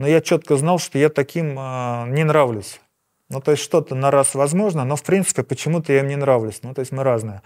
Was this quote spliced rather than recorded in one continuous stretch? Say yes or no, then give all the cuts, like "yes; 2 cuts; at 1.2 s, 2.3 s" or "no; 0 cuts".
no; 0 cuts